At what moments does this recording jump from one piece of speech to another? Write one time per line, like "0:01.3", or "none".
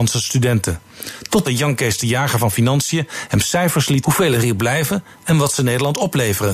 0:01.4
0:04.0